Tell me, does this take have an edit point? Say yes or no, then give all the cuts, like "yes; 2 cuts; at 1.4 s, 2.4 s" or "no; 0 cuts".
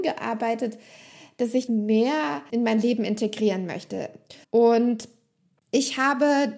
yes; 3 cuts; at 1.7 s, 2.5 s, 4.4 s